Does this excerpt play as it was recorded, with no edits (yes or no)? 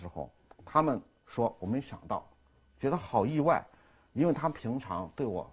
yes